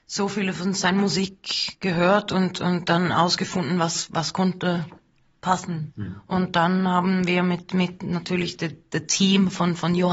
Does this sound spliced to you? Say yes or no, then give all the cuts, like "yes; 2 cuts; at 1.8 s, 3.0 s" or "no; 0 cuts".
no; 0 cuts